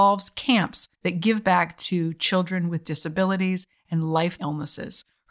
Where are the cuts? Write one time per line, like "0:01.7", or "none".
0:00.9
0:04.4